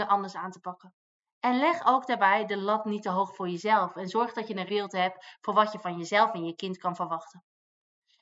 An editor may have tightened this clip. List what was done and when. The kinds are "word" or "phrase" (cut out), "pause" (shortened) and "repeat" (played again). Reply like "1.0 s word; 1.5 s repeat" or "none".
4.7 s word